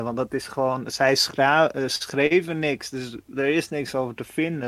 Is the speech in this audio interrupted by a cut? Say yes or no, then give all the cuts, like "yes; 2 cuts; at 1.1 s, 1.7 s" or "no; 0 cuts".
no; 0 cuts